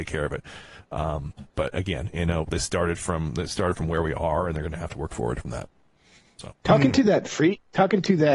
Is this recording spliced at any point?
yes; 2 cuts; at 1.5 s, 6.5 s

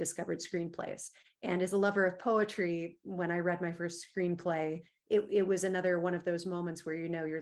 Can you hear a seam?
no; 0 cuts

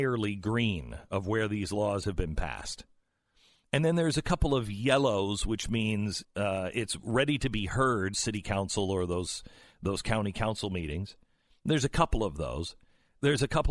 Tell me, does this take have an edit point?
yes; 2 cuts; at 6.2 s, 8.1 s

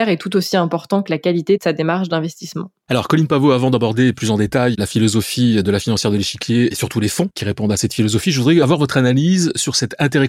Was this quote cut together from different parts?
no; 0 cuts

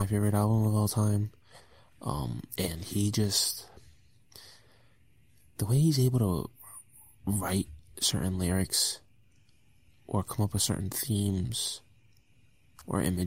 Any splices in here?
no; 0 cuts

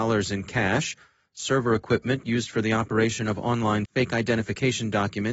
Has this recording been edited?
yes; 1 cut; at 3.8 s

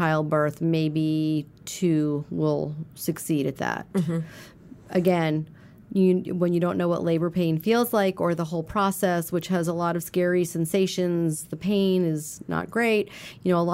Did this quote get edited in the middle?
no; 0 cuts

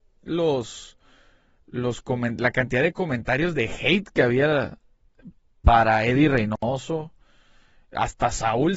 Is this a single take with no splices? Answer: yes; 0 cuts

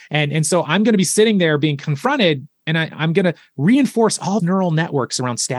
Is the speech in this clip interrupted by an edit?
yes; 2 cuts; at 2.9 s, 4.4 s

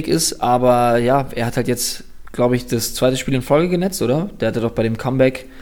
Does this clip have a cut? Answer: no; 0 cuts

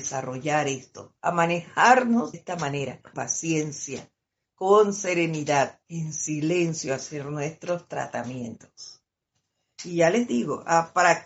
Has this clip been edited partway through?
yes; 4 cuts; at 1.2 s, 2.3 s, 3.1 s, 5.8 s

